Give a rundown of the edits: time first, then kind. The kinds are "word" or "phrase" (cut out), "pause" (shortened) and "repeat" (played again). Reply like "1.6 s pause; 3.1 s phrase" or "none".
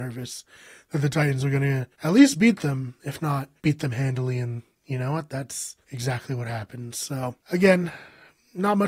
1.9 s pause; 3.6 s pause; 5.8 s pause